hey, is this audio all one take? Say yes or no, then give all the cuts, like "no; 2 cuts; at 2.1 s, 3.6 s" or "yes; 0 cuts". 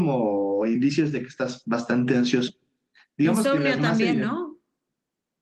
yes; 0 cuts